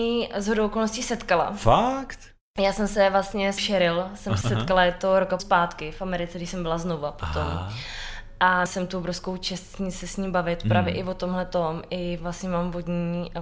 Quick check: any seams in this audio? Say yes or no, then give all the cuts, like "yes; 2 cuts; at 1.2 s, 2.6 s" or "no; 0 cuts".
yes; 4 cuts; at 3.6 s, 4.4 s, 5.4 s, 8.7 s